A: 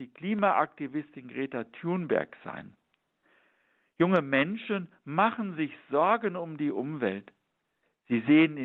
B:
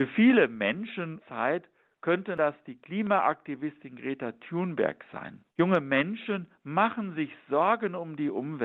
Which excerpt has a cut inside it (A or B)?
B